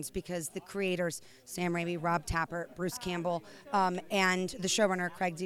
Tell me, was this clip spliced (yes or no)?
no